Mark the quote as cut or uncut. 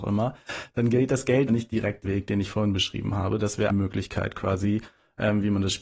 cut